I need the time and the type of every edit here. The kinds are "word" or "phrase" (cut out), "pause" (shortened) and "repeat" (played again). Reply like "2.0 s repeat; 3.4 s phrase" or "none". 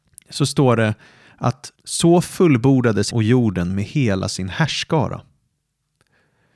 1.8 s pause; 3.1 s word